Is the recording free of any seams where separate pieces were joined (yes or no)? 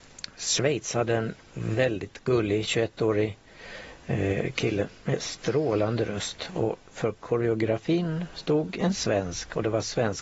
yes